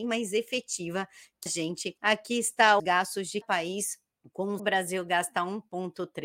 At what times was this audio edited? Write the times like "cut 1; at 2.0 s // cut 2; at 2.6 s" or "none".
cut 1; at 1.5 s // cut 2; at 2.0 s // cut 3; at 2.8 s // cut 4; at 3.4 s // cut 5; at 4.2 s // cut 6; at 4.6 s